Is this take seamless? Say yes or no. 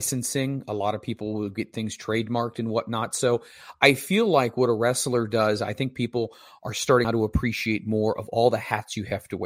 no